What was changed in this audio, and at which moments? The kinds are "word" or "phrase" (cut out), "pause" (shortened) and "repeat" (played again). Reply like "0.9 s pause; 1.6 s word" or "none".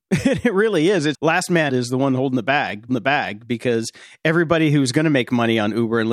1.1 s word; 1.7 s word; 2.9 s repeat